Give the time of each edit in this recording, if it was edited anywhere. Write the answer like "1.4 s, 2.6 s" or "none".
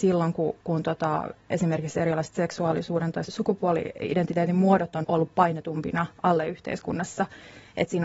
3.2 s, 5.0 s, 6.2 s